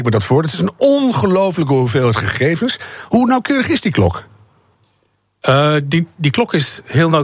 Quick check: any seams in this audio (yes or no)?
no